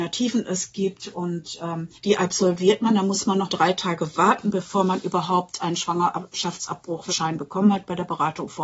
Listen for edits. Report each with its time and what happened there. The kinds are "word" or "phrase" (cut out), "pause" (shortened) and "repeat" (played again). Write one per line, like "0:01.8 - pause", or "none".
0:02.0 - pause
0:03.5 - word
0:07.1 - phrase